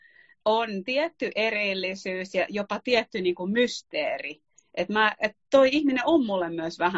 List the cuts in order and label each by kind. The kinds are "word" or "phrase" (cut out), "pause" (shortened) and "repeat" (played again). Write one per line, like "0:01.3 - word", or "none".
none